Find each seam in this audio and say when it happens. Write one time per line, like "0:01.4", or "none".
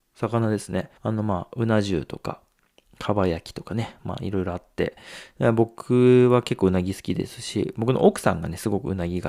0:01.0